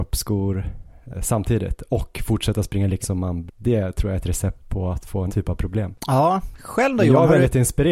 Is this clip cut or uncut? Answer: cut